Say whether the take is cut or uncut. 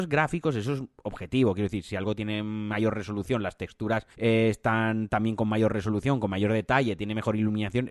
cut